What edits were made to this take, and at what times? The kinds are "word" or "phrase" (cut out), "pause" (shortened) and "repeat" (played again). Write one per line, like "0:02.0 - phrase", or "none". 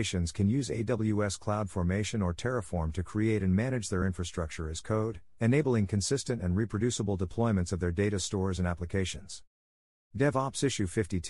none